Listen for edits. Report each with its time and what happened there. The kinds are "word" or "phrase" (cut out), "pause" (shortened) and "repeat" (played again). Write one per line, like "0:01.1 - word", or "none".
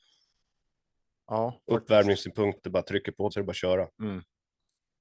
0:02.6 - word
0:03.3 - word